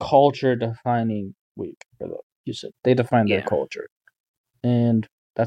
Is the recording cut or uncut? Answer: cut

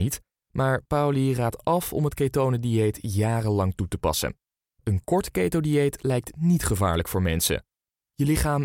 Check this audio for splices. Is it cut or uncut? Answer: uncut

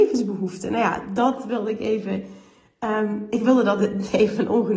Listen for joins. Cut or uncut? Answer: uncut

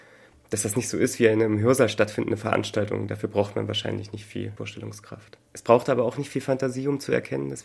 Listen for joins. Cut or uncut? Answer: cut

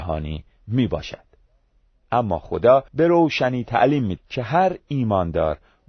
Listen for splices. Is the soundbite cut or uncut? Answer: cut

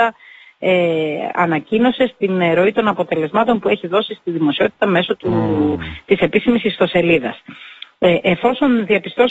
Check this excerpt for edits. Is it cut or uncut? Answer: uncut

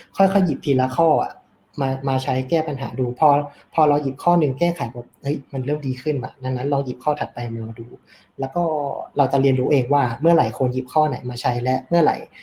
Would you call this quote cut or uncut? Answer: uncut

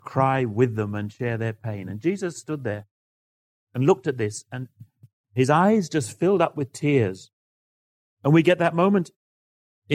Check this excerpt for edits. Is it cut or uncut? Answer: uncut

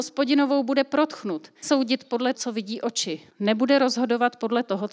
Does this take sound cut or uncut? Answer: cut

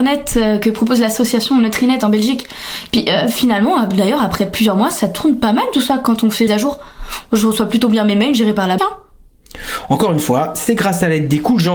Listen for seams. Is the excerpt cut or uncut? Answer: cut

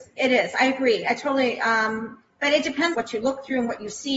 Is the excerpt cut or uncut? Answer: cut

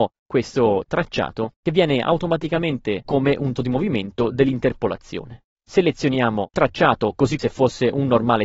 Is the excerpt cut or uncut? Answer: cut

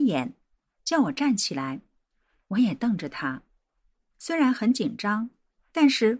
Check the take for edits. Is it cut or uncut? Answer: uncut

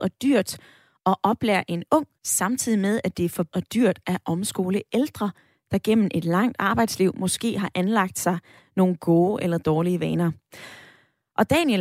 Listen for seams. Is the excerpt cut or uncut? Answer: cut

